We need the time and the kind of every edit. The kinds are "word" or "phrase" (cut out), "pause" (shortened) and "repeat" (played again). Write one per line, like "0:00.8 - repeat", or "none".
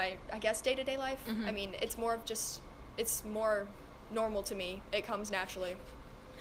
none

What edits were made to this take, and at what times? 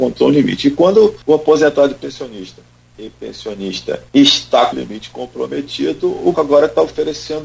0:01.2 - pause
0:02.9 - phrase
0:04.1 - pause
0:04.7 - word
0:06.3 - word

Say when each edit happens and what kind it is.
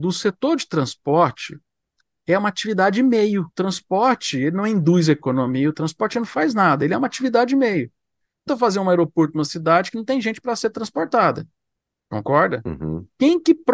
0:03.5 - pause
0:08.5 - word

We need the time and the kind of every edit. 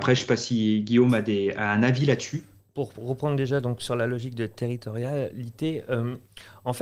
none

